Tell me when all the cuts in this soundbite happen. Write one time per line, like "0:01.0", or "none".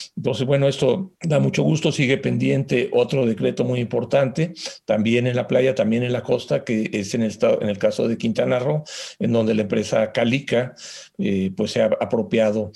0:01.1